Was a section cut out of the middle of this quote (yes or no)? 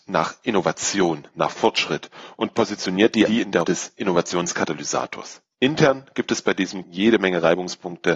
yes